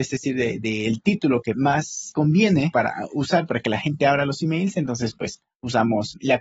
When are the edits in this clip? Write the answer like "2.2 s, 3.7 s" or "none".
none